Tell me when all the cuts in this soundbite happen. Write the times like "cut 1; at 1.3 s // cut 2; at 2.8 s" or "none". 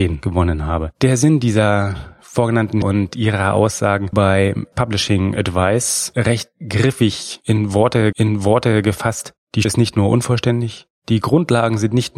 cut 1; at 2.8 s // cut 2; at 4.1 s // cut 3; at 4.7 s // cut 4; at 8.1 s // cut 5; at 9.6 s